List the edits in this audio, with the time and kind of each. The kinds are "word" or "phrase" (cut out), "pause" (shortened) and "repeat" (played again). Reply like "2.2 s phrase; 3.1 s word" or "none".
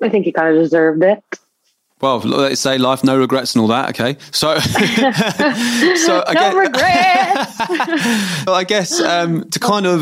8.5 s word